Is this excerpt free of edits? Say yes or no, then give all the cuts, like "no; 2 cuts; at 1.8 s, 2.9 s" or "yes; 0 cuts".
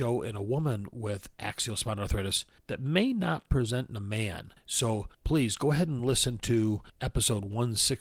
yes; 0 cuts